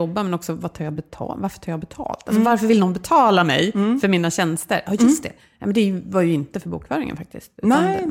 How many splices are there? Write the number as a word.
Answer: zero